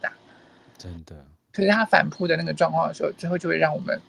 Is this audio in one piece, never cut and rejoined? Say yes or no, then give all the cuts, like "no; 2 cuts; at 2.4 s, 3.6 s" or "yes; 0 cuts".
yes; 0 cuts